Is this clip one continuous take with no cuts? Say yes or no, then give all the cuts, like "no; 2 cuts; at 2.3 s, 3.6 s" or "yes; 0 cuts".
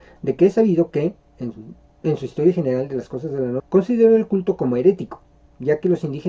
no; 1 cut; at 3.6 s